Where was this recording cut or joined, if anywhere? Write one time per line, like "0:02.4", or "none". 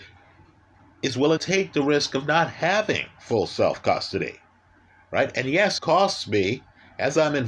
0:01.4
0:05.8